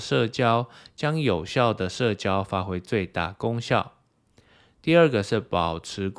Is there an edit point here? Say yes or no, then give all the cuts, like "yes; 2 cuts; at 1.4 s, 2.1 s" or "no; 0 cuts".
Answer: no; 0 cuts